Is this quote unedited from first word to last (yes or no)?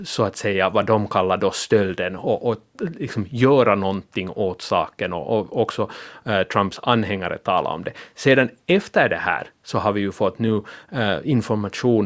yes